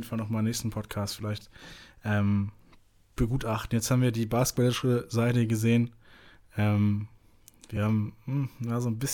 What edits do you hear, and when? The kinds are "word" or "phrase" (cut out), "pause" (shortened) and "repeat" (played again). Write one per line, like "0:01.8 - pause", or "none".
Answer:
none

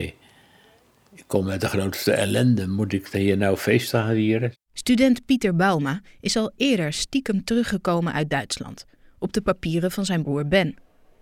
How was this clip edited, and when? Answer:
0:04.6 - pause

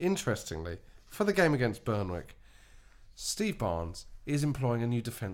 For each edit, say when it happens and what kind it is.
none

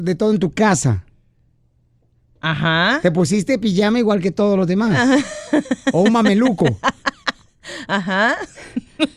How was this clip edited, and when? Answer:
none

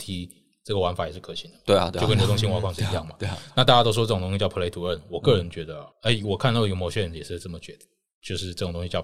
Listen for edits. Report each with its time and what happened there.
0:05.9 - pause

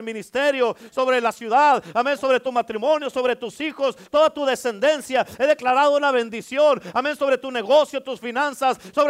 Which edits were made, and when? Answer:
none

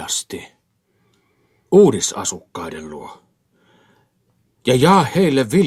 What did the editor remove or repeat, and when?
none

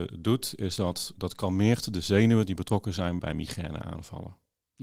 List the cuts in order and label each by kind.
0:01.1 - word
0:03.2 - word

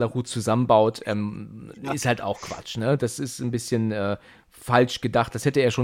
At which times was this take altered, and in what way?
none

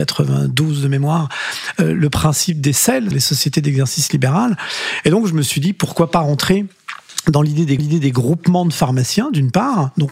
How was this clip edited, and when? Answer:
0:03.1 - word
0:07.8 - repeat

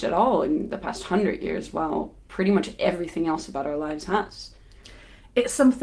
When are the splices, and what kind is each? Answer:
none

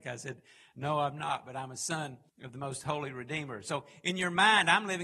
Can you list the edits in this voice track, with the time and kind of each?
0:02.3 - pause

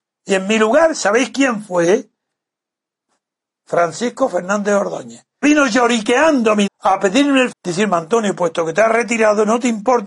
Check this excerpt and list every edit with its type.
0:05.4 - word
0:06.7 - word
0:07.5 - word

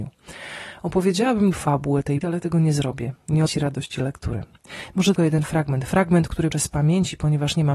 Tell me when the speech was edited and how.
0:01.5 - word
0:02.2 - word
0:03.5 - word
0:05.2 - word
0:06.5 - word

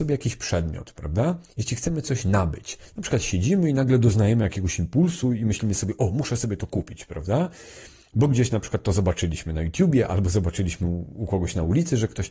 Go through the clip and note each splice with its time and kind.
none

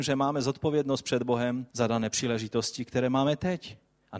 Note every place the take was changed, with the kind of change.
0:01.7 - pause

